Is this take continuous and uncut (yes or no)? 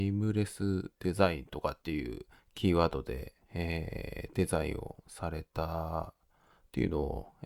no